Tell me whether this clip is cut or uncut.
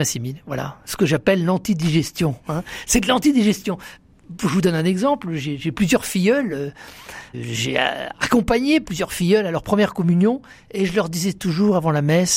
uncut